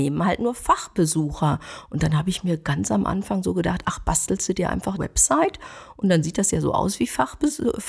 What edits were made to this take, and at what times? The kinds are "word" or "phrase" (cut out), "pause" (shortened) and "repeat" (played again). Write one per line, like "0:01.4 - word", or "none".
0:05.0 - word